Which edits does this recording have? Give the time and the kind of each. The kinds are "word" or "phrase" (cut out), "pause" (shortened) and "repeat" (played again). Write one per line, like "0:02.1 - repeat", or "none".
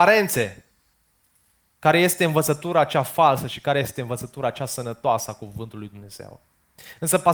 none